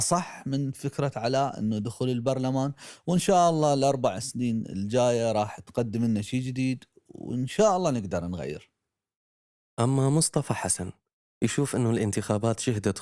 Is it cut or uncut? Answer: uncut